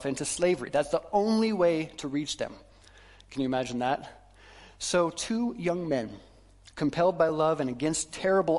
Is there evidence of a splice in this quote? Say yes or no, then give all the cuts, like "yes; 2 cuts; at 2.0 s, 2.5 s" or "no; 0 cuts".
no; 0 cuts